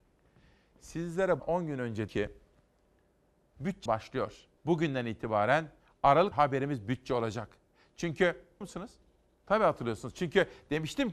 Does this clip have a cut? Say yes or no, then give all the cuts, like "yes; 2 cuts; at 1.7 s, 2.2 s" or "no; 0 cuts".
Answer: yes; 6 cuts; at 1.4 s, 2.1 s, 3.9 s, 4.6 s, 6.3 s, 8.6 s